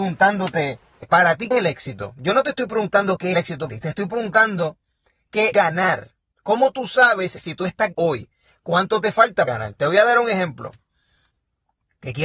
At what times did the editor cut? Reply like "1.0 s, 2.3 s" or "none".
1.0 s, 1.5 s, 3.3 s, 3.7 s, 5.5 s, 7.4 s, 7.9 s, 9.5 s

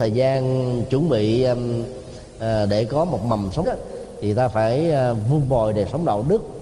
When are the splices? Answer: 3.6 s

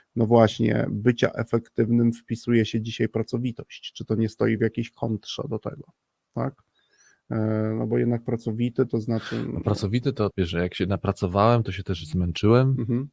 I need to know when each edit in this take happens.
10.3 s

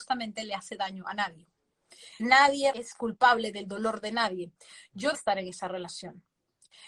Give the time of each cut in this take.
2.2 s, 2.7 s, 5.1 s

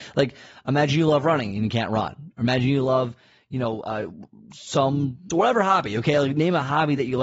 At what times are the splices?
5.3 s

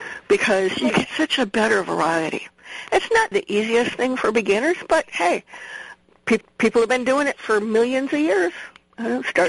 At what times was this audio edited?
3.3 s, 6.4 s

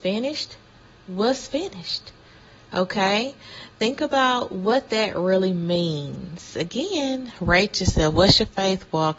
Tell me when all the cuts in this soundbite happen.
none

